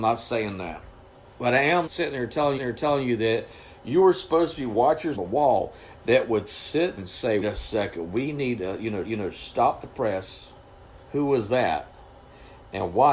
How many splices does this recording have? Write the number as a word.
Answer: seven